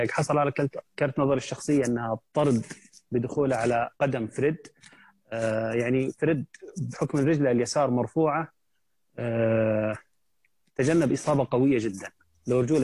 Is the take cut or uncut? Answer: cut